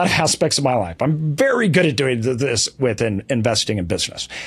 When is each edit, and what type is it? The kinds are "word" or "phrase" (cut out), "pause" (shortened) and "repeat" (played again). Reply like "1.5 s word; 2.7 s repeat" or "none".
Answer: none